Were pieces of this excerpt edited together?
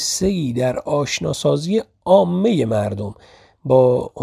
no; 0 cuts

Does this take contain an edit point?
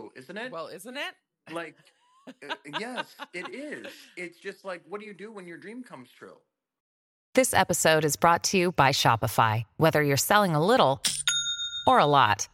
no; 0 cuts

